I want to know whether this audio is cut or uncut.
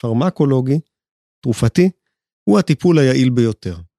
uncut